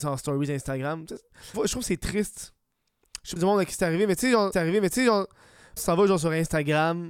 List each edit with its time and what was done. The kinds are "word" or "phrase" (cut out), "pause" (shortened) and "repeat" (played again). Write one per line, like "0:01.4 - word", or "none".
0:01.5 - phrase
0:03.4 - phrase
0:04.5 - repeat
0:05.8 - word